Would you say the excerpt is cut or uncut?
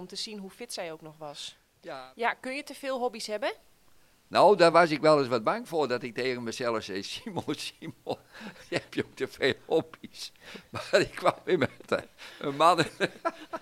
uncut